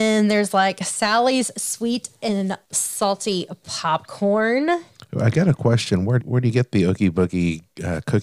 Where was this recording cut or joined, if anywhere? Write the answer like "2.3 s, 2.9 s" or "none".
2.6 s, 6.2 s